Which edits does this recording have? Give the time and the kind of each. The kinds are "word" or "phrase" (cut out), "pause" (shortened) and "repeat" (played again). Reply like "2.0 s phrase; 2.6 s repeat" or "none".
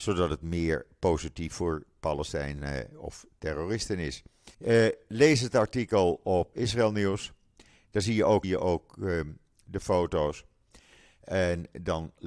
4.5 s pause; 6.5 s word; 8.4 s phrase